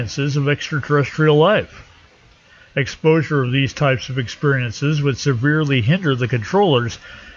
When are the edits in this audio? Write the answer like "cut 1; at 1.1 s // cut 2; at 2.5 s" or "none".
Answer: none